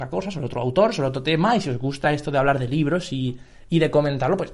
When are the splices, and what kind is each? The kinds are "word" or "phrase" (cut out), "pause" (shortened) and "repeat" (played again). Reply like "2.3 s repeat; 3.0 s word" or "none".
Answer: none